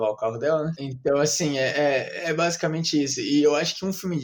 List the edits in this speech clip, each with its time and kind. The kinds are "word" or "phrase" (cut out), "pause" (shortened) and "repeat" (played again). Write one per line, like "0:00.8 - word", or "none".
none

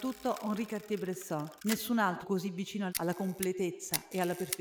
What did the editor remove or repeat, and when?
0:01.6 - pause
0:02.2 - phrase
0:02.9 - word

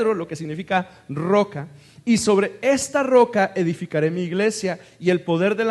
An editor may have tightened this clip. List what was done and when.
none

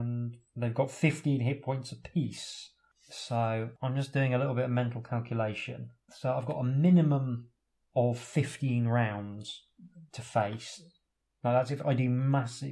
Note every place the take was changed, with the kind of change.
none

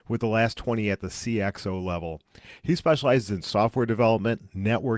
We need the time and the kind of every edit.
none

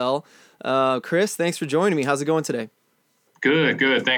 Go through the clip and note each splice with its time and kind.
none

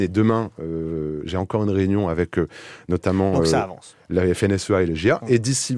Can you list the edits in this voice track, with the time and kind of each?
none

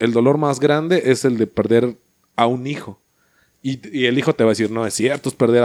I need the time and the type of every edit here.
none

